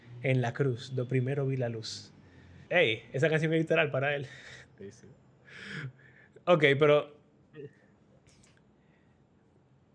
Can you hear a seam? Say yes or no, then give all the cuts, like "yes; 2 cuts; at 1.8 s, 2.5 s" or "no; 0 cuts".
yes; 2 cuts; at 2.7 s, 4.7 s